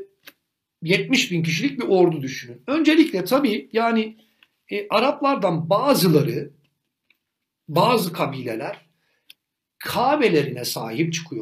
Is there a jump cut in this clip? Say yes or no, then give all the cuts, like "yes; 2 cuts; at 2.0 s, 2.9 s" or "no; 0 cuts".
no; 0 cuts